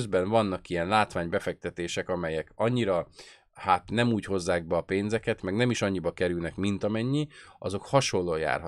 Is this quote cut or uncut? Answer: uncut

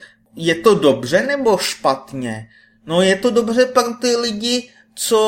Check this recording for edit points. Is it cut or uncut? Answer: uncut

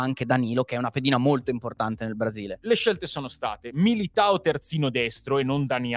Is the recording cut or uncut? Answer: uncut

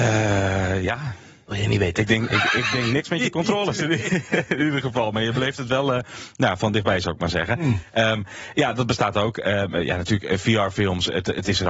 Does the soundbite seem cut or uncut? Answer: uncut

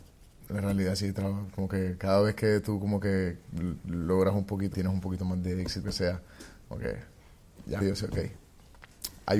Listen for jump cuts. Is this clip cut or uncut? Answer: cut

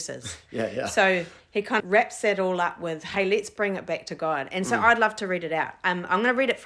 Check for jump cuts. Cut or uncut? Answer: cut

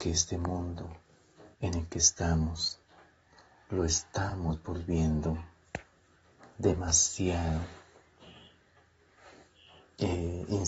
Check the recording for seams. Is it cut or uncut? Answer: cut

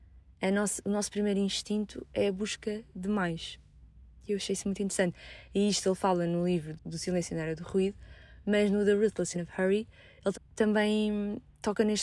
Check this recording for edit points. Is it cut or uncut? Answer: cut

